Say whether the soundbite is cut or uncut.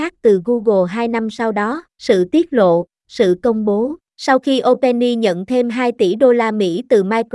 cut